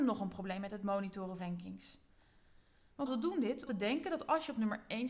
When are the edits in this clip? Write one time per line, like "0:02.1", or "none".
0:01.4
0:03.1
0:03.7